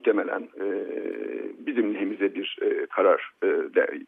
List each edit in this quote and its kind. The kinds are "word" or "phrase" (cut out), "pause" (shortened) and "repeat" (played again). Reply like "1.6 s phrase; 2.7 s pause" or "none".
none